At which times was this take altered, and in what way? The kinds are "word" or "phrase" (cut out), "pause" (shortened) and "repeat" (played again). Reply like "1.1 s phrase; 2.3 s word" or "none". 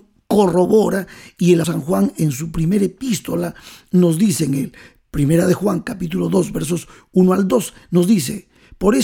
1.6 s word